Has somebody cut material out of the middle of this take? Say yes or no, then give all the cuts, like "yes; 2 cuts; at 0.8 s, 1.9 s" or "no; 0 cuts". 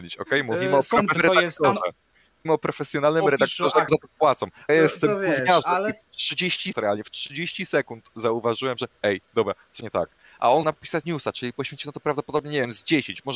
yes; 8 cuts; at 1.1 s, 2.4 s, 3.9 s, 4.7 s, 6.7 s, 9.8 s, 10.6 s, 11.0 s